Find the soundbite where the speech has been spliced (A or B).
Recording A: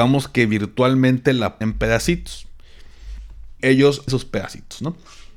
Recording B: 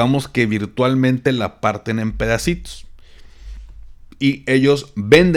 A